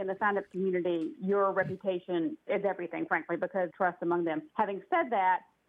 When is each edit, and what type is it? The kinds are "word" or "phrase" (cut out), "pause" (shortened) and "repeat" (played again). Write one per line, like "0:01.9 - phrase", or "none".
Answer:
0:02.5 - word
0:03.1 - word
0:03.7 - phrase
0:04.5 - pause